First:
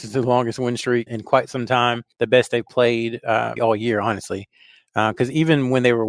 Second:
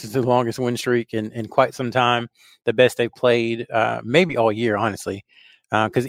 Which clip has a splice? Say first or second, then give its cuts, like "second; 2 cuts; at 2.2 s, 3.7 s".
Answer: first; 3 cuts; at 1.1 s, 2.1 s, 3.6 s